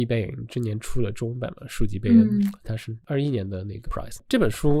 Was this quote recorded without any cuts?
no; 1 cut; at 3.9 s

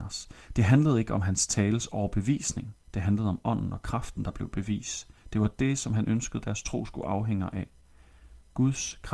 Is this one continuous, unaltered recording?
no; 1 cut; at 2.8 s

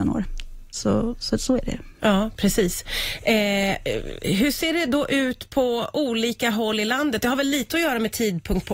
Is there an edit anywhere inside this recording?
no; 0 cuts

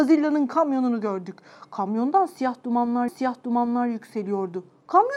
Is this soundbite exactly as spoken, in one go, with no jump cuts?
no; 1 cut; at 3.1 s

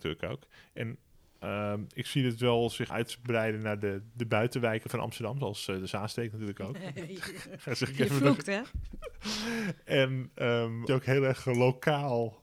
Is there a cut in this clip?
yes; 2 cuts; at 2.9 s, 10.9 s

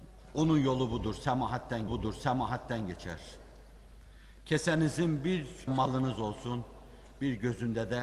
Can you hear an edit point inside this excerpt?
yes; 2 cuts; at 1.9 s, 5.7 s

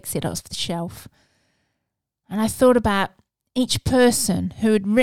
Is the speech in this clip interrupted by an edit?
no; 0 cuts

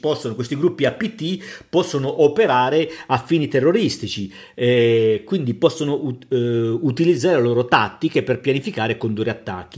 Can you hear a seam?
no; 0 cuts

